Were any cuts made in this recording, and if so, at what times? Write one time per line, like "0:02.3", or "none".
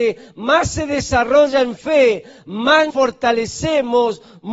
0:02.9